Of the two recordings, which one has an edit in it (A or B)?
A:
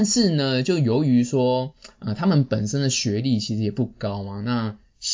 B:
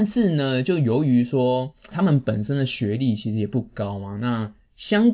B